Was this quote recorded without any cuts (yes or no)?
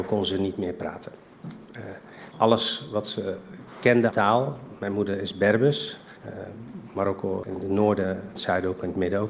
no